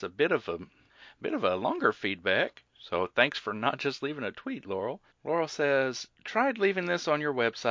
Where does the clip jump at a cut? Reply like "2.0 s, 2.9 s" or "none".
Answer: 2.7 s, 5.1 s